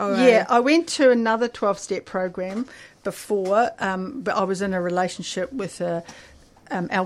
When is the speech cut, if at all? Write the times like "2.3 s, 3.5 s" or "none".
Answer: none